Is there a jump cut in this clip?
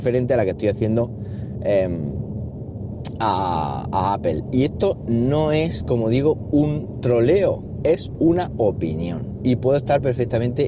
no; 0 cuts

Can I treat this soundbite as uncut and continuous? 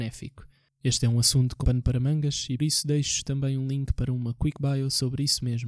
no; 2 cuts; at 1.6 s, 2.6 s

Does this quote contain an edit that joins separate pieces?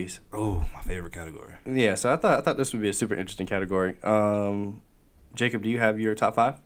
no; 0 cuts

